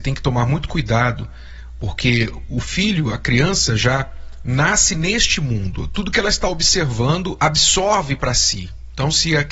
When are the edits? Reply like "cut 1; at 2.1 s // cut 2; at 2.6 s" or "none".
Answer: cut 1; at 7.4 s